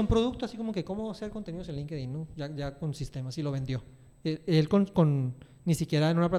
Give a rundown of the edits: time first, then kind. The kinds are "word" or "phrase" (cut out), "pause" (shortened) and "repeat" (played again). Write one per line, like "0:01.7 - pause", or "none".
none